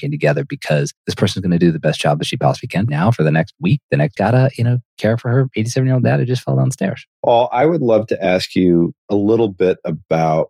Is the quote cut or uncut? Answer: cut